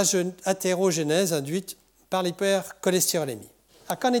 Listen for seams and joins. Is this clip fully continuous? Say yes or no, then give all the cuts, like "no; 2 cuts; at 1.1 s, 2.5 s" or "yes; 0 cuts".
yes; 0 cuts